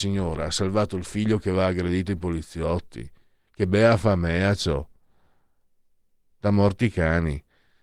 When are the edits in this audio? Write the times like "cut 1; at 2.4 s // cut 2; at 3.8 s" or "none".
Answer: none